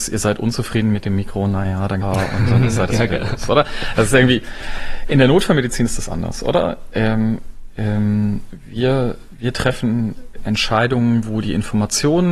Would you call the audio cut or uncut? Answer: cut